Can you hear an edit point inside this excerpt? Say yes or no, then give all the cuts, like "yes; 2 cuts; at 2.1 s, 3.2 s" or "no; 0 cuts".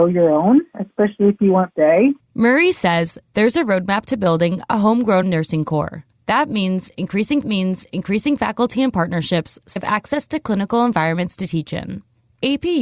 yes; 5 cuts; at 1.7 s, 2.2 s, 5.2 s, 7.4 s, 9.8 s